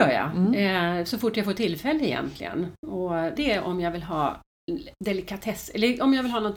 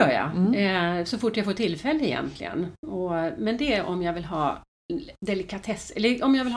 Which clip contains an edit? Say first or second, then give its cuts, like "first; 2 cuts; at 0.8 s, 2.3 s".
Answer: first; 1 cut; at 3.4 s